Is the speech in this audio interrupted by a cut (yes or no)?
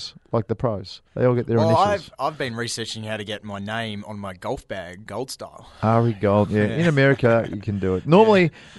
yes